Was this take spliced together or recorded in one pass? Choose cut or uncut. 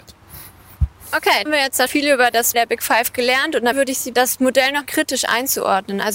cut